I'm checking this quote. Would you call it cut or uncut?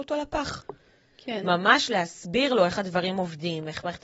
uncut